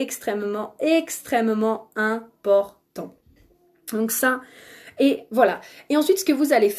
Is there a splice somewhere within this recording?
no; 0 cuts

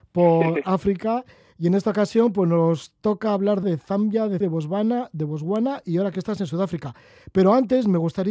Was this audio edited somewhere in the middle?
yes; 2 cuts; at 3.6 s, 4.4 s

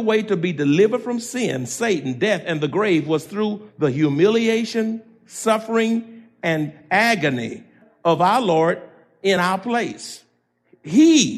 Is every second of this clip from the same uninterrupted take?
yes; 0 cuts

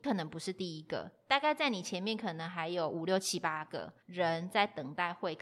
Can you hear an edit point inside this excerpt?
yes; 1 cut; at 4.0 s

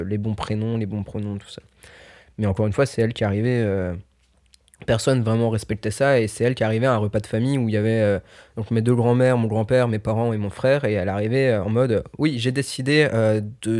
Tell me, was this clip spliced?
no; 0 cuts

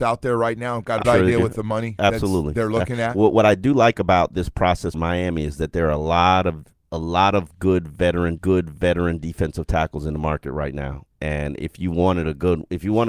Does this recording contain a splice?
yes; 3 cuts; at 1.0 s, 4.9 s, 8.4 s

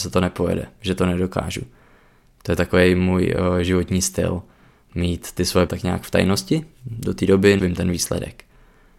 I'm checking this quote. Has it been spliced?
yes; 2 cuts; at 5.7 s, 7.6 s

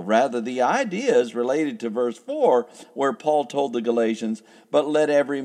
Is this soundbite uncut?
yes; 0 cuts

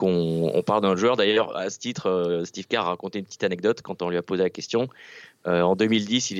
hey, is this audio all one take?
yes; 0 cuts

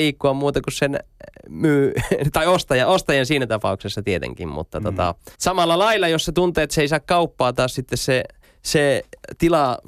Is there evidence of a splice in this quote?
yes; 2 cuts; at 5.3 s, 8.4 s

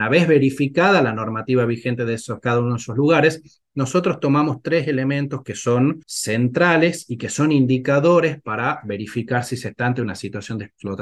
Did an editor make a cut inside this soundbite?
yes; 1 cut; at 6.0 s

